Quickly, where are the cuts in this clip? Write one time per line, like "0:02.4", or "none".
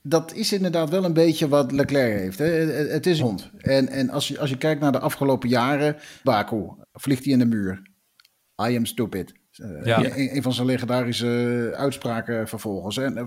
0:03.2
0:06.2
0:06.8
0:09.8
0:11.7